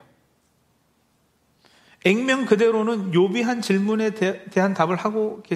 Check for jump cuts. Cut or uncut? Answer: uncut